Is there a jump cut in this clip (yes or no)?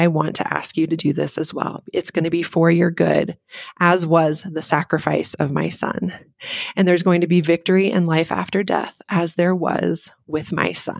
no